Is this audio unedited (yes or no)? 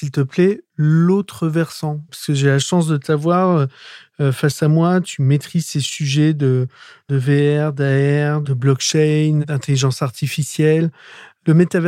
yes